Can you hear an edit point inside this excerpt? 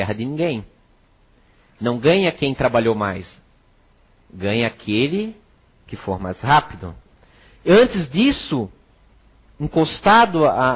no; 0 cuts

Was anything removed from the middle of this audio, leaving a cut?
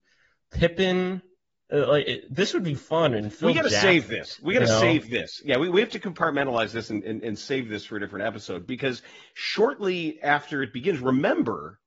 no; 0 cuts

